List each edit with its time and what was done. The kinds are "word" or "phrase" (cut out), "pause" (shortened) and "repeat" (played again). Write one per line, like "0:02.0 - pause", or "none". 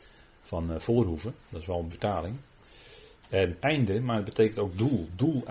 0:01.4 - pause
0:01.9 - phrase
0:03.6 - phrase